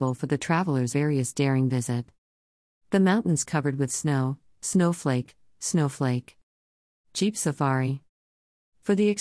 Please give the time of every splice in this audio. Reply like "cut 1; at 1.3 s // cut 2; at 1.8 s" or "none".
cut 1; at 0.9 s